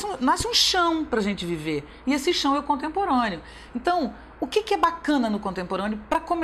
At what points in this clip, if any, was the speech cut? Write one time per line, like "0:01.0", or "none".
none